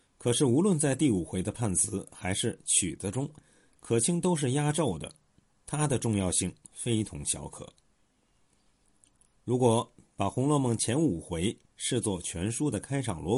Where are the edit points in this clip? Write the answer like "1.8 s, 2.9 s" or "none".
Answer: none